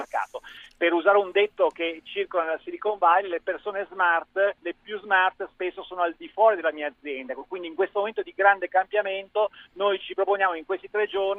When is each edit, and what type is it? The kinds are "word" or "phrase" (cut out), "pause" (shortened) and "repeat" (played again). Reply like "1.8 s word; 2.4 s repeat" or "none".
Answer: 4.6 s pause